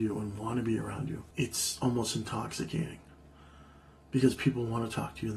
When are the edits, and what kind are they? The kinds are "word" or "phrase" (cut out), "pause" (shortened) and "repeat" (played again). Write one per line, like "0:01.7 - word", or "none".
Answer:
0:01.3 - pause